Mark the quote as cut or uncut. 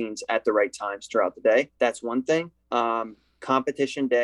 cut